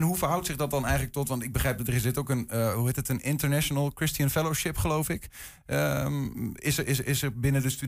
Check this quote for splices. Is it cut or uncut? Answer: uncut